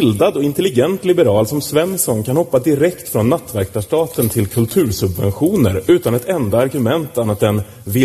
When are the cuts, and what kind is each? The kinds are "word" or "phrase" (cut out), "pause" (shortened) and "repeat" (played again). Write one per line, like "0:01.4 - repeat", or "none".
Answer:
none